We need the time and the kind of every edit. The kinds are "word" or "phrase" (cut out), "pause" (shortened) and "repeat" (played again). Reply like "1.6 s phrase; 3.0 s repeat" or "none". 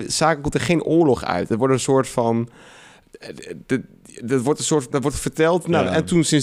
none